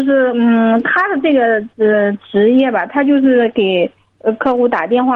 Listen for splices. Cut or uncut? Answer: cut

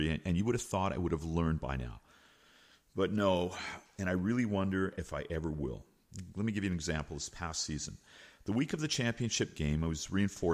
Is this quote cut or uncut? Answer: uncut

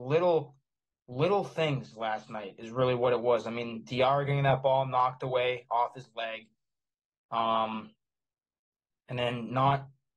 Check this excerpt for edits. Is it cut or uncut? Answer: uncut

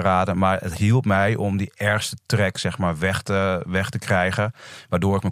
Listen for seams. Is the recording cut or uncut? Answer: uncut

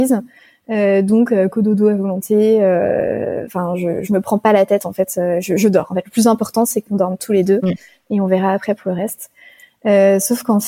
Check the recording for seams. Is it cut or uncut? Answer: uncut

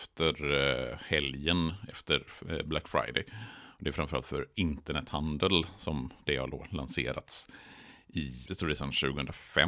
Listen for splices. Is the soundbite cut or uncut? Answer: cut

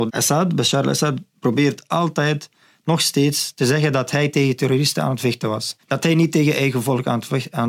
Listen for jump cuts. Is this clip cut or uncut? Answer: uncut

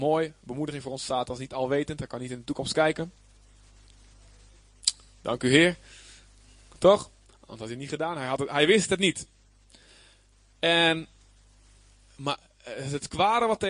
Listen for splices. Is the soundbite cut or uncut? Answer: uncut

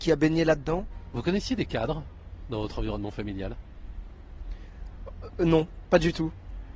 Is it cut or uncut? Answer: uncut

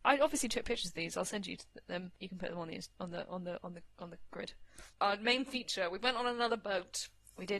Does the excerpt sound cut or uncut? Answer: cut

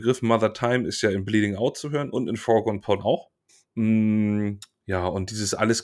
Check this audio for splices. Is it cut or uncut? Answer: cut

